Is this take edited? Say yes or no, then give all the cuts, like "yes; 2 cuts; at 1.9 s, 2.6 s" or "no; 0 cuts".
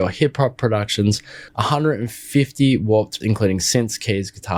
yes; 2 cuts; at 1.5 s, 3.2 s